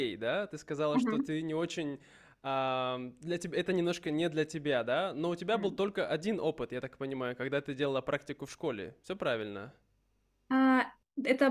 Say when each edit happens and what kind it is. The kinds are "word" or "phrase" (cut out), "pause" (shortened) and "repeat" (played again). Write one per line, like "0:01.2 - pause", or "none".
none